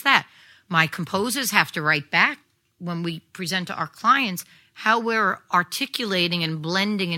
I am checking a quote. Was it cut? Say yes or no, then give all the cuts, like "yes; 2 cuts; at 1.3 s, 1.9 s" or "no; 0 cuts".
no; 0 cuts